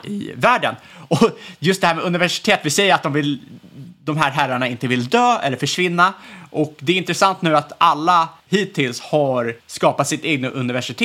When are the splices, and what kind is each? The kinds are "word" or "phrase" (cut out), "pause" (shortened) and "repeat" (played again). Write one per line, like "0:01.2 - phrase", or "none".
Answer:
0:08.4 - pause
0:09.6 - pause